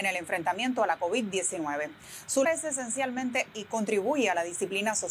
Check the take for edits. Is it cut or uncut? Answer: cut